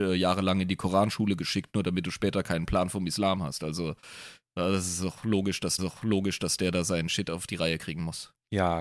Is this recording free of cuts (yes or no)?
no